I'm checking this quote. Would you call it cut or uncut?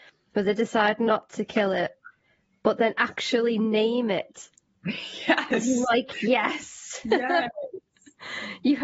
uncut